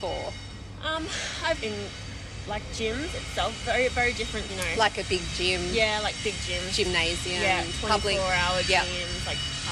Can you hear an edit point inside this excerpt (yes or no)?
yes